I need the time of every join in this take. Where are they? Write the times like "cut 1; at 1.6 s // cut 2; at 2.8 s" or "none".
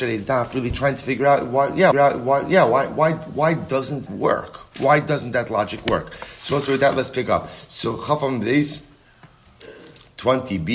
cut 1; at 1.9 s // cut 2; at 4.1 s